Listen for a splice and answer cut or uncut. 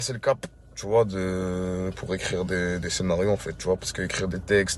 uncut